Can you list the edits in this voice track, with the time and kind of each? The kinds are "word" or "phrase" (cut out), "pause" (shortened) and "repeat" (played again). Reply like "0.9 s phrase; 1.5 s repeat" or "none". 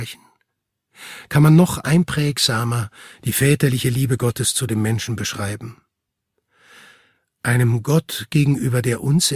none